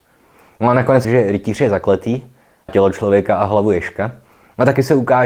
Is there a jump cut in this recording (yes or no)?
yes